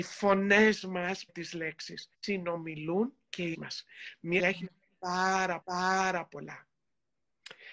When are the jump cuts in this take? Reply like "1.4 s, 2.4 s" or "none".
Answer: 1.3 s, 2.1 s, 3.5 s, 4.4 s, 5.6 s